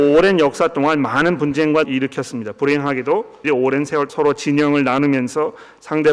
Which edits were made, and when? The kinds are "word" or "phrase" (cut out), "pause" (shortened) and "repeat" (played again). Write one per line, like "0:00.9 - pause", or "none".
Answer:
0:01.8 - phrase
0:03.4 - word
0:04.1 - phrase